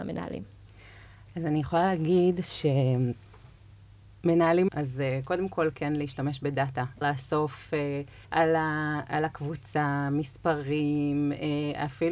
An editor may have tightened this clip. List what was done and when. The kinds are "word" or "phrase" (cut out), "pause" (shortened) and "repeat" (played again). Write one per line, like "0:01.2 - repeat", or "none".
0:04.7 - phrase
0:07.0 - phrase
0:08.2 - pause